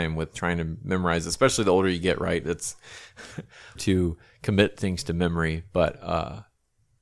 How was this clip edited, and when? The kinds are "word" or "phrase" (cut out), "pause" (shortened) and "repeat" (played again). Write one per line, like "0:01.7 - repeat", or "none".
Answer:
0:03.8 - phrase